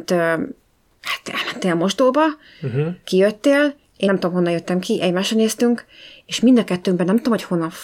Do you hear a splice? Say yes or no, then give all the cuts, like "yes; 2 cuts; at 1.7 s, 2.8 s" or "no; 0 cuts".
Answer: yes; 1 cut; at 4.1 s